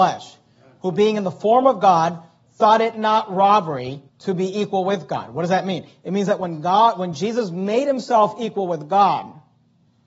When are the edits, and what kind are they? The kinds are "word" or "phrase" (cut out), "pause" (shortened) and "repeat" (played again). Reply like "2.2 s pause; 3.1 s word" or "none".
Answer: 4.1 s pause